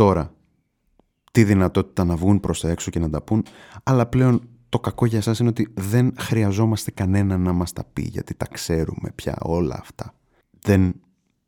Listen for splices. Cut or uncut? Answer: uncut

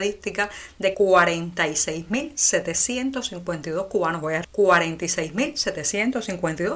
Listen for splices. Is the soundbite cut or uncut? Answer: cut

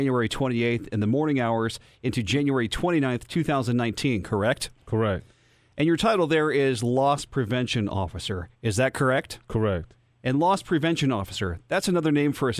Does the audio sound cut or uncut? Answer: uncut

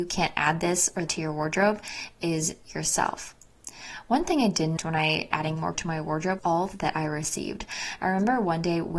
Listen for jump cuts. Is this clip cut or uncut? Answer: cut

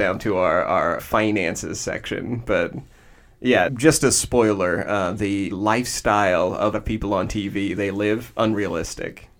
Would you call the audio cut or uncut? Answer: cut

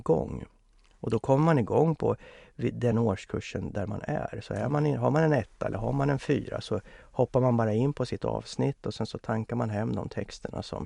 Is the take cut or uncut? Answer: uncut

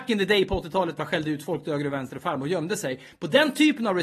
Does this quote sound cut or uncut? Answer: cut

